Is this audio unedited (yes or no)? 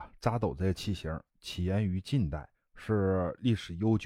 no